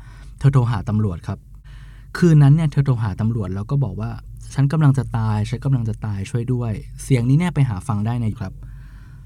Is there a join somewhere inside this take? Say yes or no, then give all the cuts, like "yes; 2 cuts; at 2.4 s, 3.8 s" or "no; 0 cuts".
yes; 1 cut; at 8.3 s